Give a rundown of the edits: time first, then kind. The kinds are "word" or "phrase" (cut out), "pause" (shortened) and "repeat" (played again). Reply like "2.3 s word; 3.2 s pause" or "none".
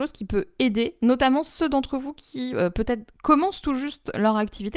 none